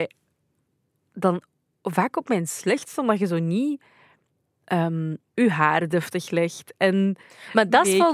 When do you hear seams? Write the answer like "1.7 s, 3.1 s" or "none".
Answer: 5.3 s